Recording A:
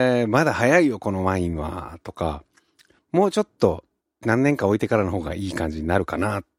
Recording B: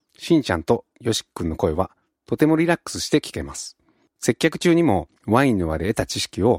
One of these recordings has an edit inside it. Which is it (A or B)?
B